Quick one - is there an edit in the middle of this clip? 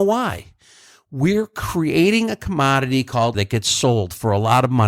yes; 1 cut; at 3.3 s

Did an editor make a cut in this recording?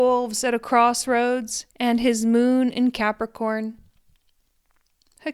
yes; 1 cut; at 1.7 s

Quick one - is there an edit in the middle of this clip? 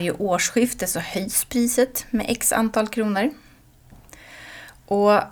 no; 0 cuts

